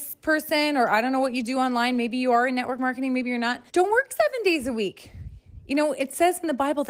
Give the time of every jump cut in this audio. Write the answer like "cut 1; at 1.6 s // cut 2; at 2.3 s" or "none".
cut 1; at 3.7 s